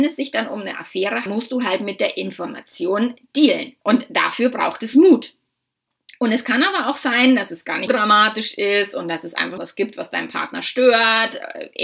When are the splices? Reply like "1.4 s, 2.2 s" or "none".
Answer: 1.3 s, 3.8 s, 7.9 s, 9.6 s